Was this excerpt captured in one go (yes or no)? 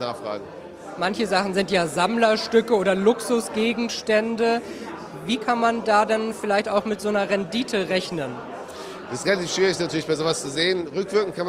yes